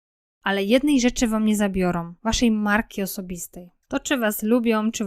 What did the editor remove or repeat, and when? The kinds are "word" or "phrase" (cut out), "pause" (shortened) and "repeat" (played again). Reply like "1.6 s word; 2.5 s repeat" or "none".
2.2 s pause; 3.8 s pause